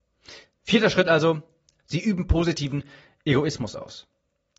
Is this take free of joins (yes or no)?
yes